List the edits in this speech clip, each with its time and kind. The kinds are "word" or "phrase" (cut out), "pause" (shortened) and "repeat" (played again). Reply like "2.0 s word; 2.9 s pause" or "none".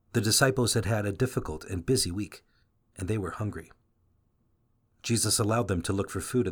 none